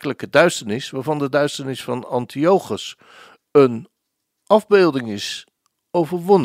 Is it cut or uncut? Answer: uncut